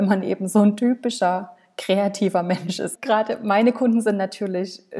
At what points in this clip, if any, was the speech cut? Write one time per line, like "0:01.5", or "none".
none